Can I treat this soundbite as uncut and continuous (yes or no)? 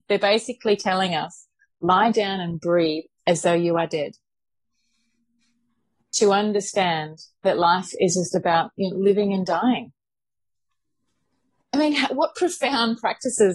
yes